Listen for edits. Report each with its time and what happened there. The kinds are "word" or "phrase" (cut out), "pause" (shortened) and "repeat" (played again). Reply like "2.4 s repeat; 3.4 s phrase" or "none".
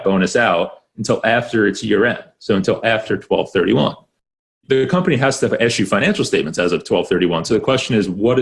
none